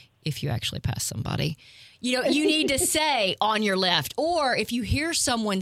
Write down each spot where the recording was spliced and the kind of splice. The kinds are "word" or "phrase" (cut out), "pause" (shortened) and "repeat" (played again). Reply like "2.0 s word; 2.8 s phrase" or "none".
none